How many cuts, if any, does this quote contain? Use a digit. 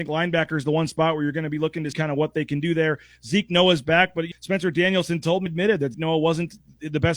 4